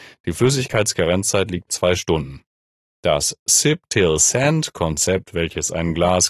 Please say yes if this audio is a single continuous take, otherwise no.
no